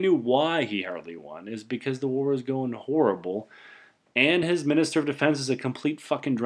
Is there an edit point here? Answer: no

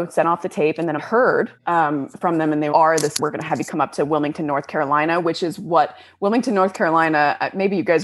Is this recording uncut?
no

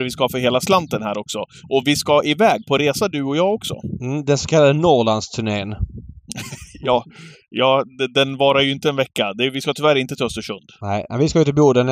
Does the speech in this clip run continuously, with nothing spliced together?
yes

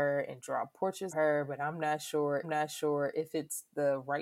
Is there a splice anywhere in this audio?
yes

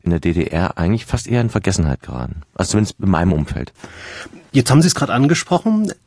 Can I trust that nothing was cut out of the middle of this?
yes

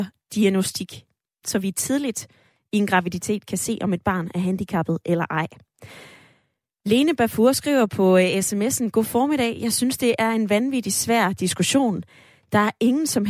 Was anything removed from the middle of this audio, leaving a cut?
no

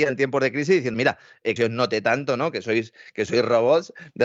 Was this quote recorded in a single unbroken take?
no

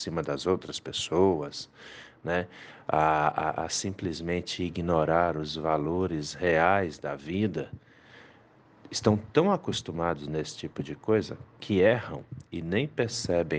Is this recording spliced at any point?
no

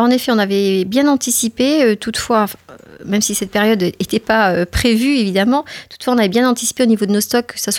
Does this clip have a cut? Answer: no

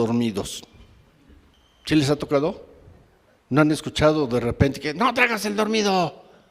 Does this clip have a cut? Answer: no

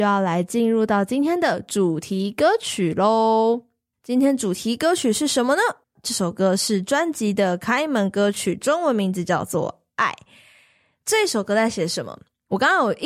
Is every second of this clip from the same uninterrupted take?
no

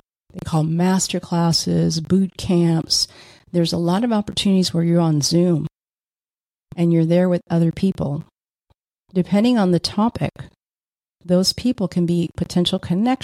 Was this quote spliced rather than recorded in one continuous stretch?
no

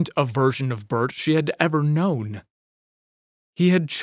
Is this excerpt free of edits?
yes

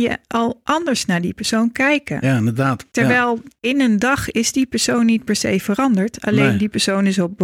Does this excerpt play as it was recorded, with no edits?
yes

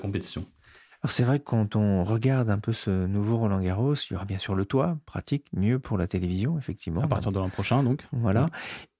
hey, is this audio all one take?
yes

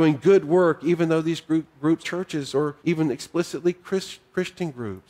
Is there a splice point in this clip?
yes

